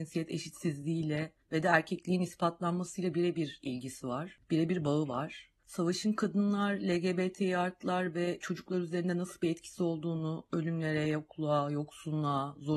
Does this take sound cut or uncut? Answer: uncut